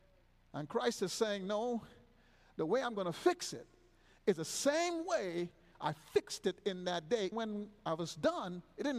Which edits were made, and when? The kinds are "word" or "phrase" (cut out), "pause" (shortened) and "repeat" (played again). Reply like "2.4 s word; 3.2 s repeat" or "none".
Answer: 7.3 s word

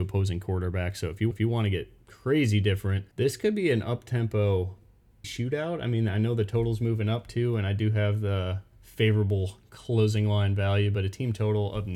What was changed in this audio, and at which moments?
1.3 s repeat; 3.1 s pause; 5.2 s word

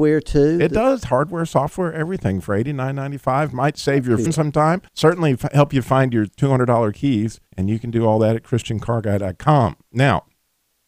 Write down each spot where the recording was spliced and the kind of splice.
4.3 s word; 4.9 s pause; 7.5 s pause

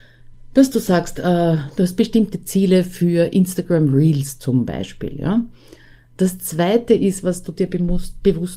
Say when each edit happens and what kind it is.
none

